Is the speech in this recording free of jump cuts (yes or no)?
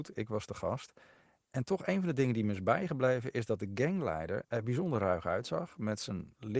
yes